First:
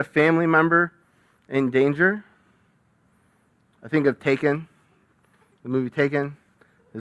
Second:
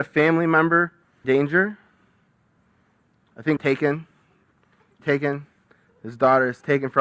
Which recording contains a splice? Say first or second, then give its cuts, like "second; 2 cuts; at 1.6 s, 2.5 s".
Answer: second; 3 cuts; at 1.2 s, 3.6 s, 5.0 s